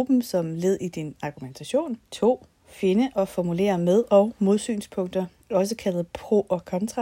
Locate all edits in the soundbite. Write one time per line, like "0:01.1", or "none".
0:02.1